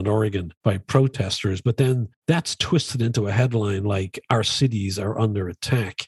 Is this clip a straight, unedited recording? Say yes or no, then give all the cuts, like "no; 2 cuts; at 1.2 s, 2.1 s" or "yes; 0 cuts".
yes; 0 cuts